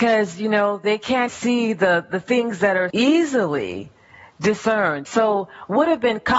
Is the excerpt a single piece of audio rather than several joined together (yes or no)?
no